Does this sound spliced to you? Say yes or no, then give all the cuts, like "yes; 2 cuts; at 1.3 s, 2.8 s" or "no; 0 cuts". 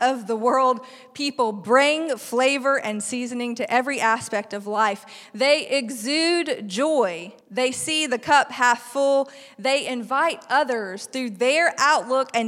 yes; 1 cut; at 7.4 s